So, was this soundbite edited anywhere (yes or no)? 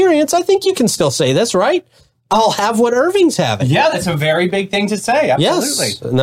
no